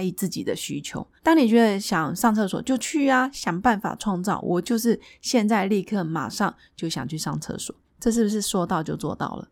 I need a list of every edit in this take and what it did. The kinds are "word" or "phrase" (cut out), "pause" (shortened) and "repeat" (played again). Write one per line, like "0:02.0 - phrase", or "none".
0:01.2 - pause